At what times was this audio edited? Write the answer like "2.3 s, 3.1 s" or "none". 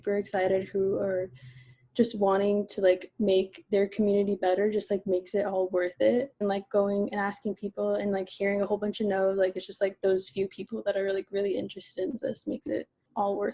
6.4 s